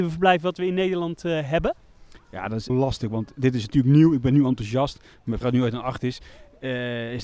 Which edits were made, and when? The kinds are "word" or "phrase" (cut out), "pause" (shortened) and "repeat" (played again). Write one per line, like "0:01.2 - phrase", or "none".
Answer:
0:02.7 - word
0:05.4 - word